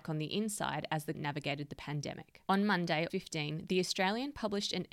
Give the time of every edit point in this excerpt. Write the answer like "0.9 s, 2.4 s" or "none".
1.1 s, 3.1 s